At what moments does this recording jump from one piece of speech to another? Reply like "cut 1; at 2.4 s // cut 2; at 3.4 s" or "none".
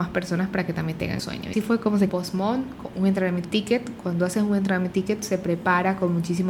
cut 1; at 1.2 s // cut 2; at 1.5 s // cut 3; at 2.1 s // cut 4; at 2.9 s // cut 5; at 3.4 s // cut 6; at 4.9 s

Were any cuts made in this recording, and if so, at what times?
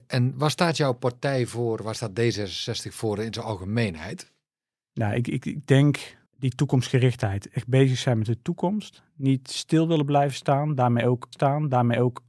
cut 1; at 6.3 s // cut 2; at 11.3 s

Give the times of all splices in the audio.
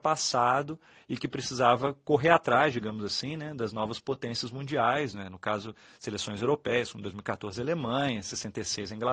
none

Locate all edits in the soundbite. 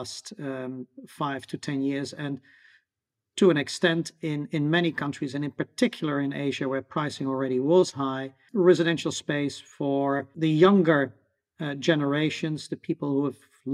none

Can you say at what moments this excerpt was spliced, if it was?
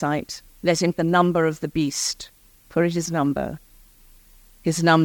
cut 1; at 0.9 s // cut 2; at 2.5 s // cut 3; at 3.1 s

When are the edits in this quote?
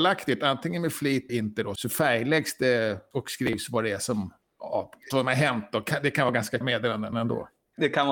cut 1; at 1.3 s // cut 2; at 1.8 s // cut 3; at 5.1 s // cut 4; at 6.6 s // cut 5; at 7.1 s

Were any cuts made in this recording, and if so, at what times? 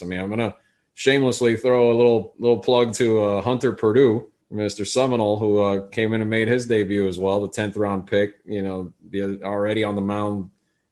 cut 1; at 2.3 s // cut 2; at 4.4 s

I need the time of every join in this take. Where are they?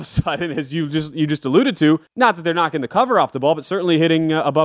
cut 1; at 2.1 s

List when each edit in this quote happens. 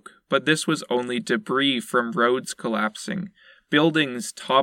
none

